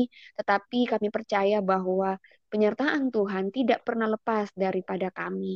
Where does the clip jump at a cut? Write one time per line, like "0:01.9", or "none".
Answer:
none